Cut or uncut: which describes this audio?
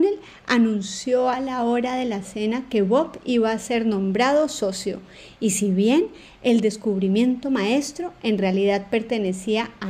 uncut